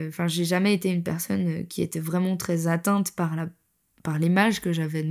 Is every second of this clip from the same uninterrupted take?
yes; 0 cuts

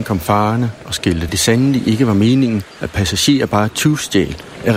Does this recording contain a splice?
yes; 2 cuts; at 1.3 s, 2.7 s

